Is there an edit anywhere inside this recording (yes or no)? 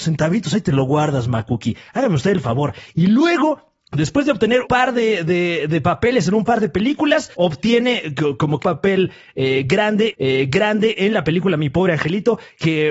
yes